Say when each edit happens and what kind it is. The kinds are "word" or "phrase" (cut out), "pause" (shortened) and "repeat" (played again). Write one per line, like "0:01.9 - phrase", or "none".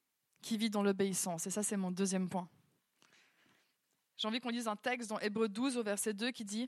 none